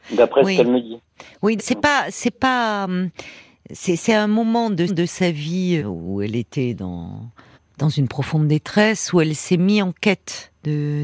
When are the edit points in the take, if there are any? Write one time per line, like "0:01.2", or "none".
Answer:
0:01.6
0:04.9
0:05.8
0:07.5